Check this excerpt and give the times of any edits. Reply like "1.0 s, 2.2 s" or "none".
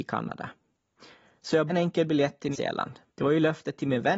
1.7 s, 2.5 s, 3.1 s